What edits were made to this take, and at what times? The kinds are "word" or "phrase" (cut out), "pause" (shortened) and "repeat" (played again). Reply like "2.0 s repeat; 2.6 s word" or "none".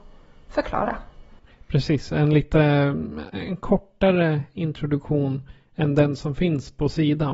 none